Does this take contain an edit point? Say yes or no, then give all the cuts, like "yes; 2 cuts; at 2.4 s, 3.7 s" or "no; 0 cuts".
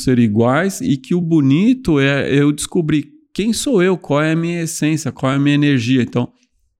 no; 0 cuts